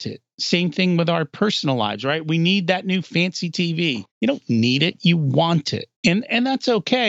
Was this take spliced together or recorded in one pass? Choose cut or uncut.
cut